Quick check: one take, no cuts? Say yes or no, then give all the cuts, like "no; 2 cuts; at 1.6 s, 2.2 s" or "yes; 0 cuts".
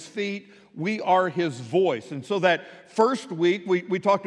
yes; 0 cuts